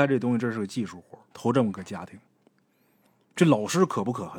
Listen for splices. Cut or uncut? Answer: cut